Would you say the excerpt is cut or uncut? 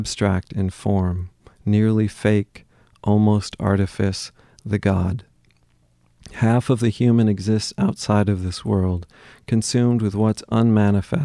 uncut